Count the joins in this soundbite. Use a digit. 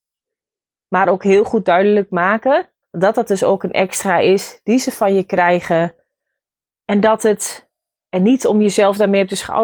1